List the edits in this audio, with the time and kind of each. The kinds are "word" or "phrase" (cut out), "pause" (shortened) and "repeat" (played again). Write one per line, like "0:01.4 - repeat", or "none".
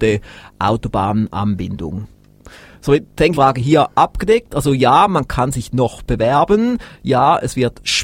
0:03.3 - phrase